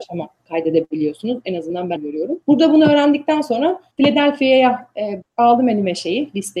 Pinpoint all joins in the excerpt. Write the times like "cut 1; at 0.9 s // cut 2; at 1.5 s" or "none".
cut 1; at 2.0 s // cut 2; at 2.4 s // cut 3; at 3.9 s // cut 4; at 5.2 s